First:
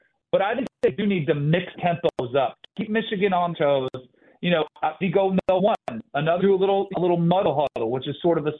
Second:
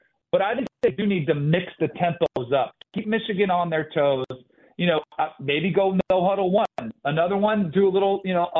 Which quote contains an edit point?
first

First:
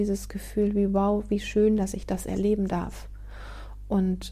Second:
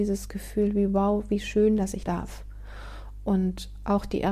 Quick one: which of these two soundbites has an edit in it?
second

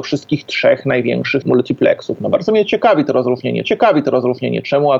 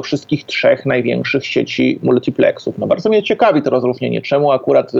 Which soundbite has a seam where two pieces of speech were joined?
first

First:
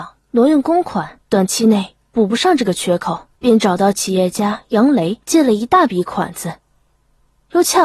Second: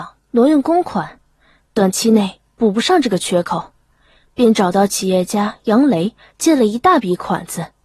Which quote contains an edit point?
first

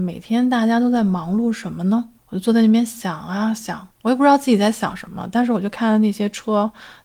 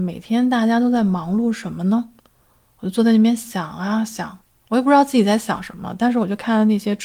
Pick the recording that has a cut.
first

